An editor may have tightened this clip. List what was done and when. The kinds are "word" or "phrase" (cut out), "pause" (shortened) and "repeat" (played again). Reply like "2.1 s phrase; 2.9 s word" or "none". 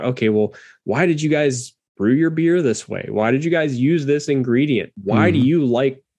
5.0 s pause